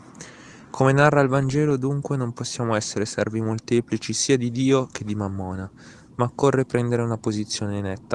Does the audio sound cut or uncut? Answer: uncut